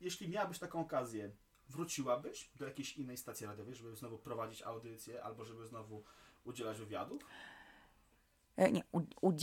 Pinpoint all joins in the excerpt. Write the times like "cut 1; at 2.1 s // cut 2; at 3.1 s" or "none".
none